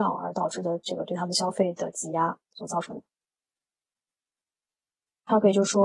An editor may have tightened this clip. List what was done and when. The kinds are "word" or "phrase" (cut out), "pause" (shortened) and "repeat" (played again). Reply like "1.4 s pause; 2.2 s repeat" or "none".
2.5 s pause